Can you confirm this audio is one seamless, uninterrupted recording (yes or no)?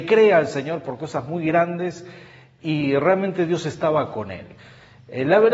yes